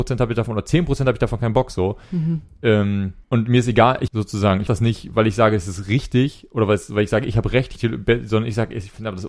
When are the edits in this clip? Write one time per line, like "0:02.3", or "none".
0:03.2
0:04.1
0:04.7
0:07.8